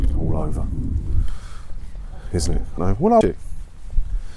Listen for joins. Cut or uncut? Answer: cut